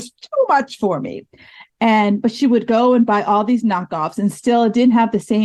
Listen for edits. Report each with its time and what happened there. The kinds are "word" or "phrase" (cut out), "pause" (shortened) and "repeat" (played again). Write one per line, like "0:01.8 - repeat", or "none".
none